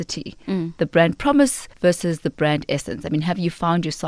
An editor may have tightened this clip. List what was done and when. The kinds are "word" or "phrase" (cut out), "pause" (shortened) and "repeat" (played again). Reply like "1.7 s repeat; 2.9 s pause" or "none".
1.7 s pause